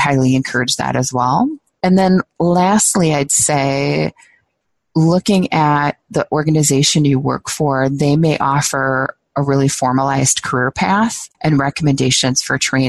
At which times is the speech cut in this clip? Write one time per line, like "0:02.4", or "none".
0:11.3